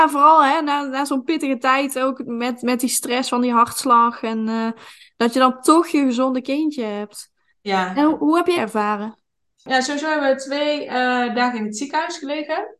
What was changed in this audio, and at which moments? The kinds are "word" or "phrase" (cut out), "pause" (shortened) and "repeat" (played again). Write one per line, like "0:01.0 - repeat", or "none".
0:08.6 - phrase

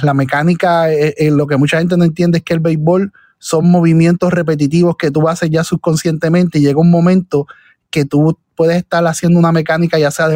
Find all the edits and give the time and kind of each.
none

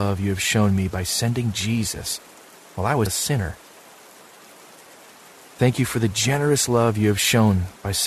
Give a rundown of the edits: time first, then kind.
0:03.1 - word

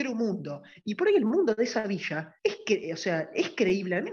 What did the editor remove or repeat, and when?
0:02.4 - pause

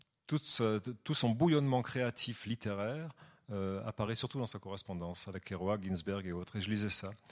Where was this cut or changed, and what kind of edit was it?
none

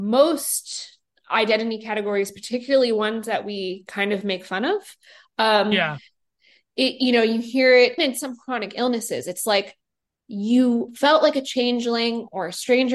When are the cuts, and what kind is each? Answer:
0:08.0 - word

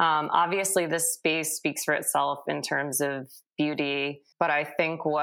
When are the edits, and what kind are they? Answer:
0:04.3 - pause

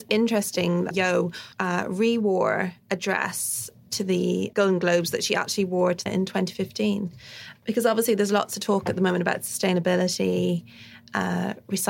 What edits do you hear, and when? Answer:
0:00.9 - word
0:01.5 - pause
0:04.5 - word
0:06.1 - phrase

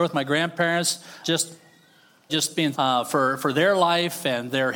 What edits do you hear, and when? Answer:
0:01.2 - word
0:02.3 - word
0:02.7 - word

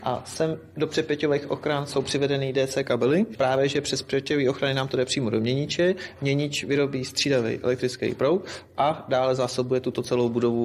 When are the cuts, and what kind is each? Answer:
none

